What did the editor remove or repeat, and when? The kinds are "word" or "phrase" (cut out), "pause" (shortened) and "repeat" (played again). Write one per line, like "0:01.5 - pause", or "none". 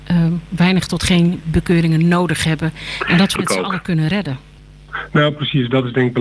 0:03.4 - word

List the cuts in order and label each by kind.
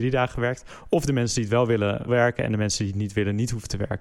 0:02.1 - word

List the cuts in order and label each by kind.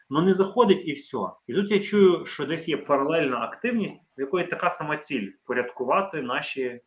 0:01.4 - pause
0:04.1 - pause

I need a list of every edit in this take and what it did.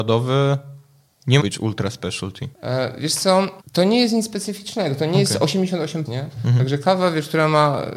0:01.4 - word
0:02.5 - pause
0:03.6 - pause
0:06.1 - word

